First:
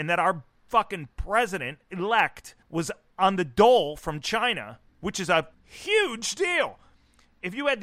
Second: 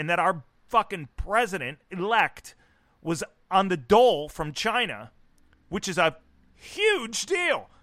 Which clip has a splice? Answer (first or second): first